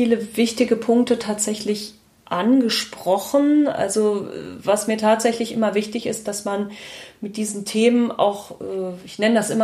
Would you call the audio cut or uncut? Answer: uncut